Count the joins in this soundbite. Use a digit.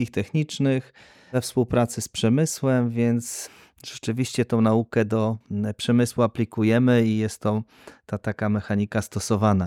0